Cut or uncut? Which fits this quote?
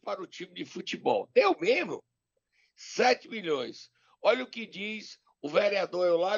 uncut